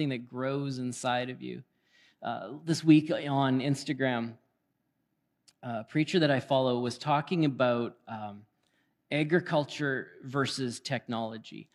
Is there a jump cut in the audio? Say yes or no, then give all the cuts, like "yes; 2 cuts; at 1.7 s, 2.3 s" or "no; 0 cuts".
no; 0 cuts